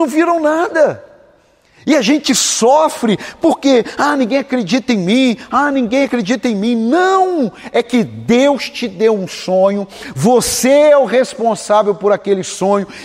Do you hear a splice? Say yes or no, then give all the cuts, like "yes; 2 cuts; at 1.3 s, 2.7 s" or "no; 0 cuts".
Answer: no; 0 cuts